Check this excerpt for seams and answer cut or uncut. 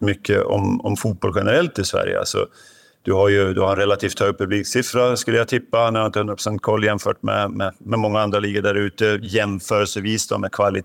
uncut